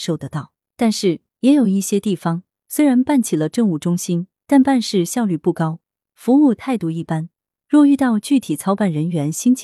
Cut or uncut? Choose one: uncut